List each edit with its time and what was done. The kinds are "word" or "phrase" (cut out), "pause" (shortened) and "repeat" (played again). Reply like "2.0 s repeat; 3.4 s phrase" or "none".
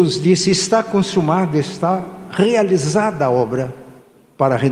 none